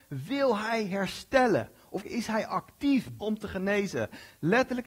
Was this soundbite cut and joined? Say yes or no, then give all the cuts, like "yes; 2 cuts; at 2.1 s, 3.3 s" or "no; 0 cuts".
yes; 2 cuts; at 2.0 s, 3.2 s